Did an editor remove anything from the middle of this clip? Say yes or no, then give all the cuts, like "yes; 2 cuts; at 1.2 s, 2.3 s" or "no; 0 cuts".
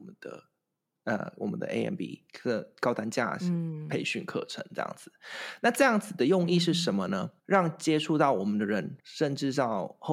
yes; 3 cuts; at 2.3 s, 7.4 s, 9.0 s